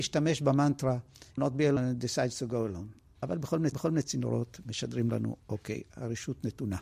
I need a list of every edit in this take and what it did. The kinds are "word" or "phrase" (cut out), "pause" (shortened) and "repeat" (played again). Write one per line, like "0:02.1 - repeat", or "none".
0:01.4 - word
0:01.8 - word
0:03.7 - repeat
0:05.4 - pause